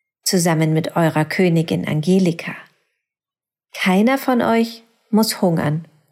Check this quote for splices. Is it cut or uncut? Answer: uncut